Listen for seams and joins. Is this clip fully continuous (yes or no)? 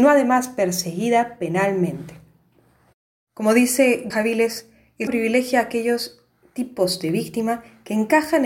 no